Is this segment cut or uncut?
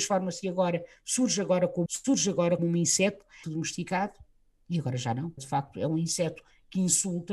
cut